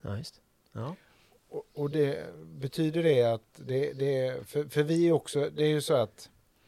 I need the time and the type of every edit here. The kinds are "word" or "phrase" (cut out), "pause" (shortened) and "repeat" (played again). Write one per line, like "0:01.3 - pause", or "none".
none